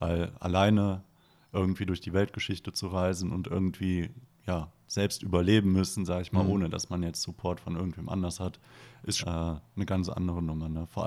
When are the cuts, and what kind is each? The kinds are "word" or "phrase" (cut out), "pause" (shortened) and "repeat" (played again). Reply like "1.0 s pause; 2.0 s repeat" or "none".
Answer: 9.2 s word